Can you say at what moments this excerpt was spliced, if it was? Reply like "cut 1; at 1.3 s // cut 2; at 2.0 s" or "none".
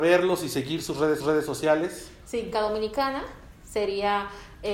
cut 1; at 1.2 s // cut 2; at 2.5 s

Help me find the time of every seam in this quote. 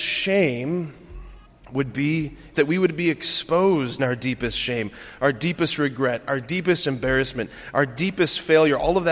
cut 1; at 1.5 s // cut 2; at 2.5 s // cut 3; at 4.0 s

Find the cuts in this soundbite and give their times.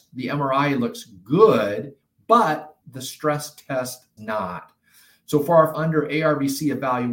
cut 1; at 2.8 s // cut 2; at 4.2 s // cut 3; at 5.7 s

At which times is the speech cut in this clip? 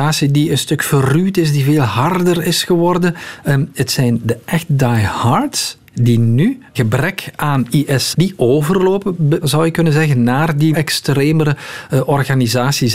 cut 1; at 5.9 s // cut 2; at 6.8 s // cut 3; at 8.1 s // cut 4; at 9.4 s // cut 5; at 10.7 s

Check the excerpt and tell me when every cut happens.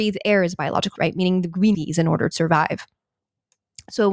cut 1; at 1.0 s // cut 2; at 1.7 s // cut 3; at 2.3 s

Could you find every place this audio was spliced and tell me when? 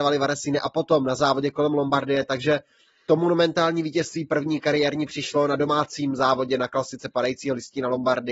none

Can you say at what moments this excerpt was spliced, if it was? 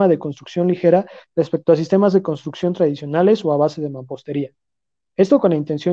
none

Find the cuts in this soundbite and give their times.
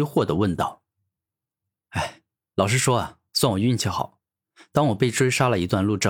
none

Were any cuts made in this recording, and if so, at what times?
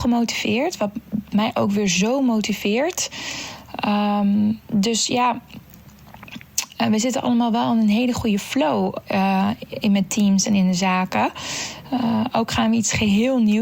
none

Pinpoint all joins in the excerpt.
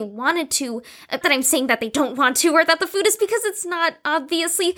cut 1; at 1.2 s // cut 2; at 3.2 s

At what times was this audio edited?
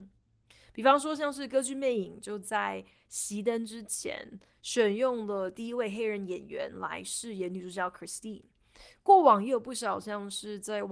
none

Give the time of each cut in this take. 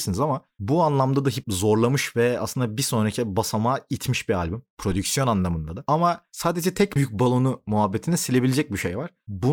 cut 1; at 1.4 s // cut 2; at 7.0 s

